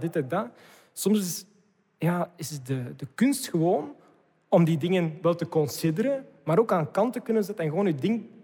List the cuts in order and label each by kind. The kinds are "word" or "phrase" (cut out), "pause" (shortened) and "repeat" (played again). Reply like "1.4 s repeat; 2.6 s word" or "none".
none